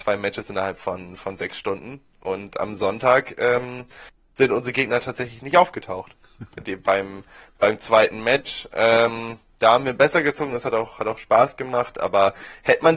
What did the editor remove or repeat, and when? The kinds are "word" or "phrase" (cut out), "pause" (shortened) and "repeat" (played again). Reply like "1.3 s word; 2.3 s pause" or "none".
none